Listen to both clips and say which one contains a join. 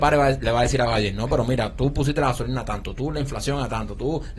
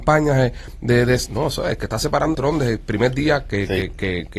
second; 1 cut; at 2.3 s

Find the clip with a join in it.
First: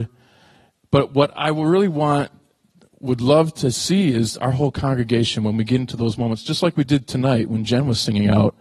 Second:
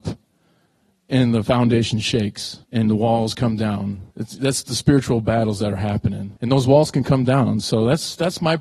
second; 3 cuts; at 2.6 s, 4.1 s, 6.4 s

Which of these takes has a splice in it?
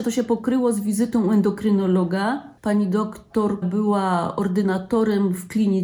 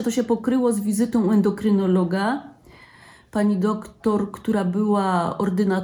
first; 2 cuts; at 2.6 s, 3.6 s

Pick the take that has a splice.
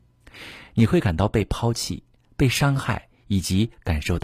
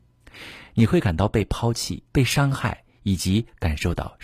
second; 1 cut; at 2.1 s

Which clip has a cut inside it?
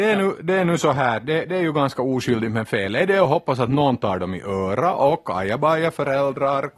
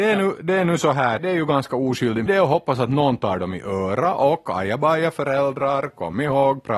second; 2 cuts; at 1.2 s, 2.3 s

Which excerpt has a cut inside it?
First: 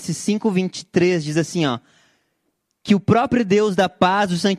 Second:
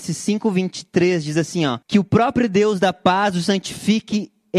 second; 1 cut; at 1.8 s

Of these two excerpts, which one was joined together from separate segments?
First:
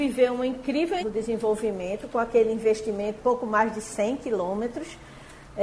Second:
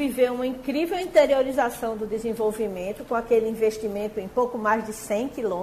first; 2 cuts; at 1.0 s, 3.2 s

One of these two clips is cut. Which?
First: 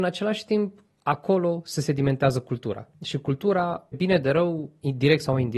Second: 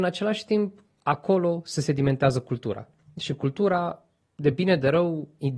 first; 2 cuts; at 2.9 s, 3.9 s

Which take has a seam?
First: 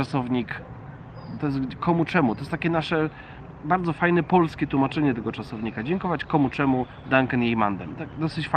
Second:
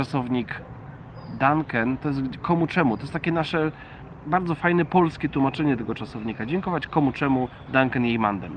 first; 1 cut; at 1.4 s

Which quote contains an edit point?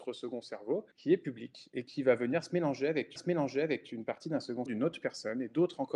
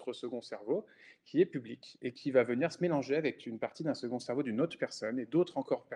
first; 3 cuts; at 0.9 s, 3.2 s, 4.7 s

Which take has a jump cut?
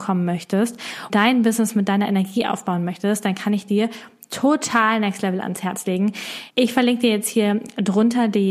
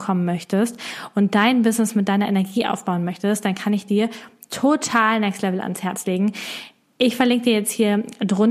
first; 2 cuts; at 1.1 s, 6.5 s

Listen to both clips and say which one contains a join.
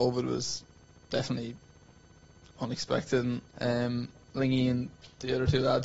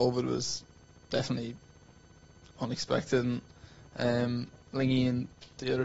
first; 1 cut; at 3.5 s

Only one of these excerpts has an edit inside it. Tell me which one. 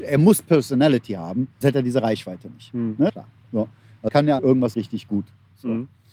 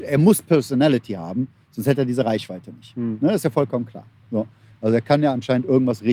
first; 5 cuts; at 1.6 s, 3.1 s, 4.1 s, 4.4 s, 4.7 s

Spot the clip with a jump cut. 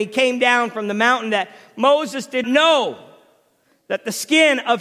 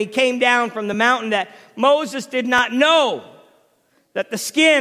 first; 1 cut; at 2.4 s

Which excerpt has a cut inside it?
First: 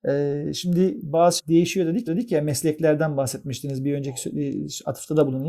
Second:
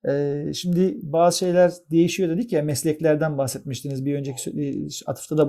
first; 2 cuts; at 1.4 s, 2.1 s

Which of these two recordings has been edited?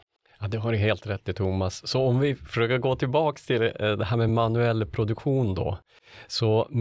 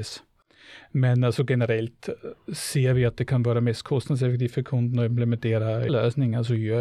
second; 1 cut; at 5.9 s

